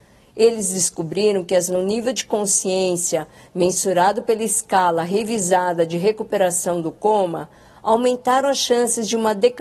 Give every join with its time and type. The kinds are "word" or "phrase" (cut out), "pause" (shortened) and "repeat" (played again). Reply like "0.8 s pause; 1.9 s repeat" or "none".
1.7 s word